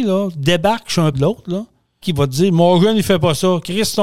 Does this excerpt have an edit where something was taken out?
yes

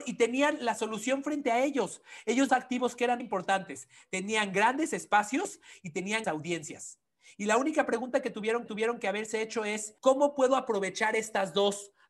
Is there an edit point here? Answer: yes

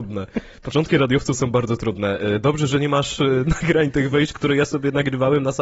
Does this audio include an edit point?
no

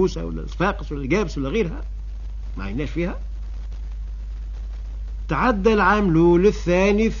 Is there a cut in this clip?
no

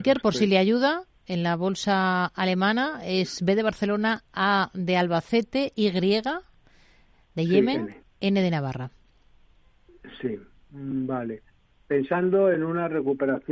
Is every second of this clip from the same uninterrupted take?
yes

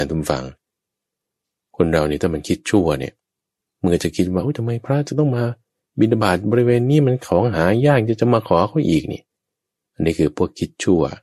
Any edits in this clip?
no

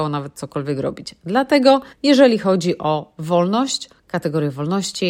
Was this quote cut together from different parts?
yes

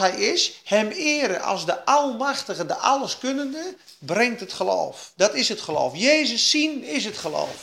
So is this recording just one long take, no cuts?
yes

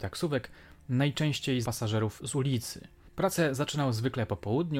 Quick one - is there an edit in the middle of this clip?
yes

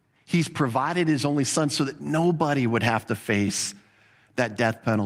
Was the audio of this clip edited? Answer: no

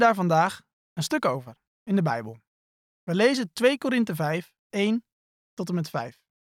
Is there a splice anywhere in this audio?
yes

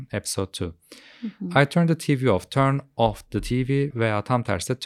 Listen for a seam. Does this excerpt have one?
yes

